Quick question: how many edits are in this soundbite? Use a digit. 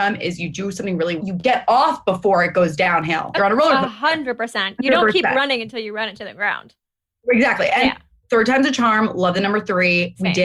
2